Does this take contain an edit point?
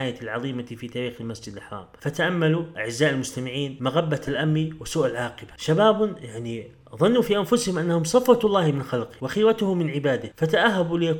no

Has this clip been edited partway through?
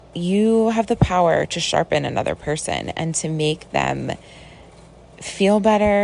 no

